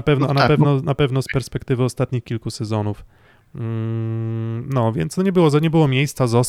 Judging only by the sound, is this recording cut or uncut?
uncut